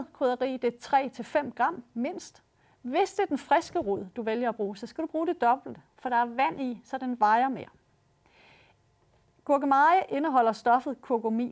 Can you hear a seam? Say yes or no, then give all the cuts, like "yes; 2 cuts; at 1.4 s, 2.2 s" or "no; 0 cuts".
no; 0 cuts